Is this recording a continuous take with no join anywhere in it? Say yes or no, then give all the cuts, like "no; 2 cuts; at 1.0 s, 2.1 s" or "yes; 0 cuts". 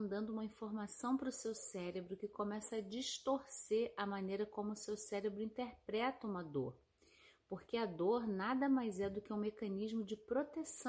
yes; 0 cuts